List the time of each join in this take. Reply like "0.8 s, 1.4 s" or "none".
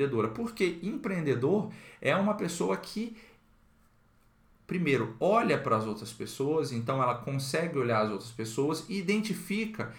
none